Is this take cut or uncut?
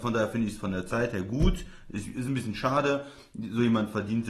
uncut